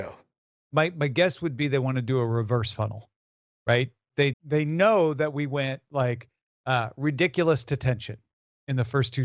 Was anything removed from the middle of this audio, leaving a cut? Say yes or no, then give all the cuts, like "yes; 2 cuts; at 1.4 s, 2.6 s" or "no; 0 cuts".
yes; 1 cut; at 4.3 s